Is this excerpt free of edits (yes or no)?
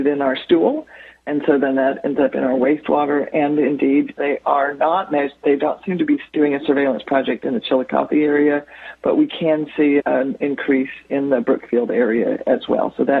no